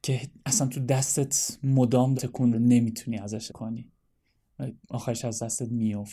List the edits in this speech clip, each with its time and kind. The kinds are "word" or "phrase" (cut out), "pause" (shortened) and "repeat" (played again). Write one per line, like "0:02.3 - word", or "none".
0:02.2 - word
0:02.5 - word
0:03.5 - word
0:04.8 - pause